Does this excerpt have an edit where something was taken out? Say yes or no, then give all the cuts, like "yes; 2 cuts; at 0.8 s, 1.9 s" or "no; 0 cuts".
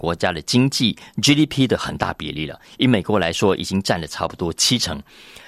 no; 0 cuts